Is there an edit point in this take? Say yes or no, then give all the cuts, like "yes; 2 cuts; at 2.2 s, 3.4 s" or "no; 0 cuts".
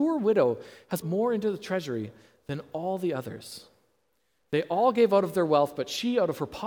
yes; 1 cut; at 1.0 s